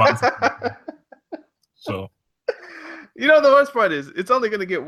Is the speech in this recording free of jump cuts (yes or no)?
yes